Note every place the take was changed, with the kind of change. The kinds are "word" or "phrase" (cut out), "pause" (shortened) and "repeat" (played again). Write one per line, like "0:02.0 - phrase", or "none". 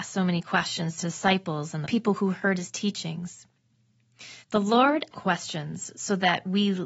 0:01.0 - word
0:01.8 - phrase
0:04.4 - pause
0:05.1 - word